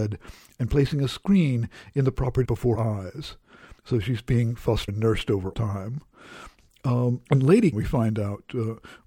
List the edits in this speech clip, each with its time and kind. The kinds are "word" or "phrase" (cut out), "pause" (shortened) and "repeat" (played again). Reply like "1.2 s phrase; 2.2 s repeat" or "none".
2.4 s word; 2.7 s word; 3.8 s pause; 4.9 s word; 5.5 s phrase; 7.3 s pause; 7.7 s word